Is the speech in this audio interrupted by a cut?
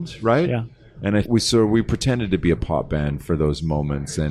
yes; 1 cut; at 1.2 s

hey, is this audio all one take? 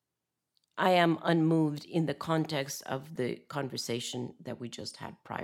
yes; 0 cuts

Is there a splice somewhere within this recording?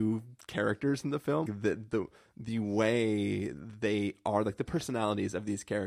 yes; 1 cut; at 1.5 s

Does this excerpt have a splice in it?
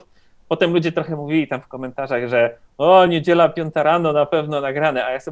no; 0 cuts

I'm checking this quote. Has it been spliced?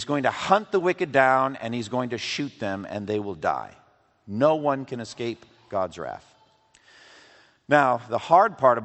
no; 0 cuts

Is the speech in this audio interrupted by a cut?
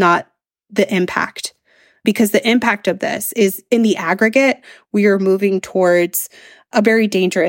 no; 0 cuts

